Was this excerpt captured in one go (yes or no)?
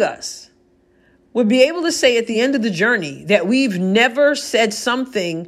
yes